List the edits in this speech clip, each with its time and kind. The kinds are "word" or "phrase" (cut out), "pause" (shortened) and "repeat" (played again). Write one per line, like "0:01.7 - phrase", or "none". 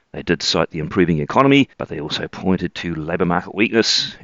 0:01.7 - pause